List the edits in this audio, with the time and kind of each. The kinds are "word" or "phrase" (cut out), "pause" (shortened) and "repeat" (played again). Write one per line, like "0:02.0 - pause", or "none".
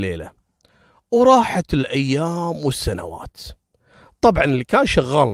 none